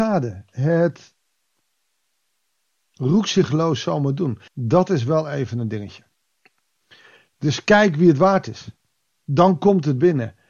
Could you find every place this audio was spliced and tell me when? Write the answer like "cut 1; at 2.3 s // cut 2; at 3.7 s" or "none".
cut 1; at 4.5 s